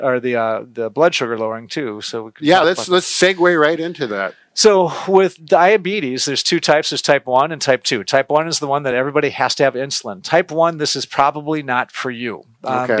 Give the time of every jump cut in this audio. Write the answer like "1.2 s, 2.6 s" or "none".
none